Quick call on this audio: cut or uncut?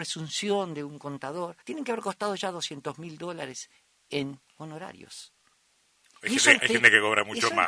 cut